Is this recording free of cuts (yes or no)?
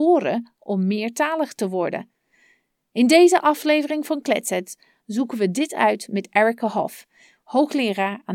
yes